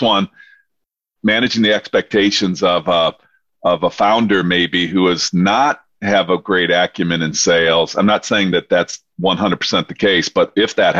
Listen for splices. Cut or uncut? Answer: uncut